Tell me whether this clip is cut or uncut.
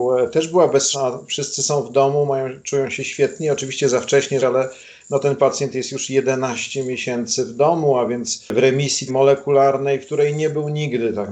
cut